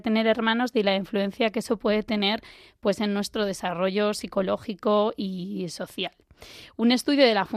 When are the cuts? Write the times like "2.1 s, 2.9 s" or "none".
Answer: none